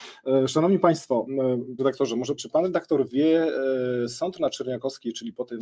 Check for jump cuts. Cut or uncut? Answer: cut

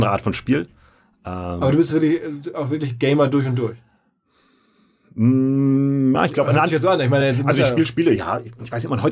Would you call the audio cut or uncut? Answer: uncut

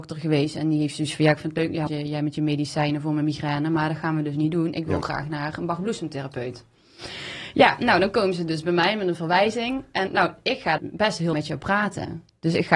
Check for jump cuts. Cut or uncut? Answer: cut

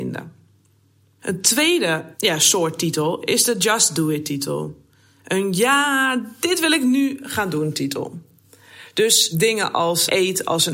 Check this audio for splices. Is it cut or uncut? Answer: uncut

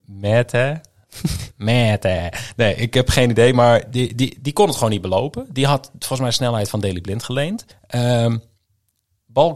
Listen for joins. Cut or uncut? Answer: cut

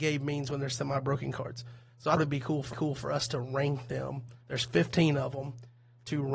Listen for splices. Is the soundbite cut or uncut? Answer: cut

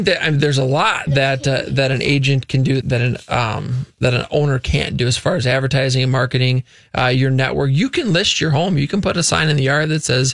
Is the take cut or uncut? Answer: cut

